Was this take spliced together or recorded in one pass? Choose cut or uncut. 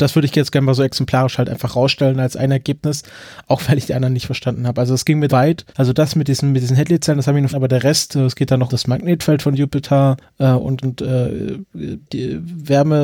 cut